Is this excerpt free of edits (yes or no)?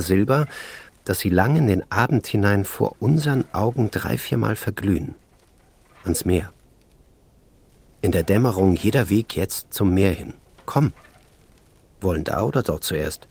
yes